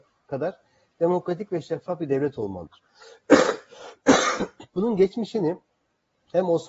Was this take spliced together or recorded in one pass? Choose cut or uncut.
uncut